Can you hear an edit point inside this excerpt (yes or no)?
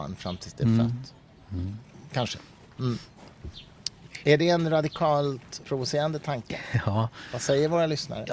yes